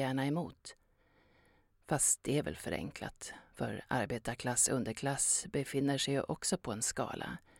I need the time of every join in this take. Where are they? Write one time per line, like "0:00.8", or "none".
none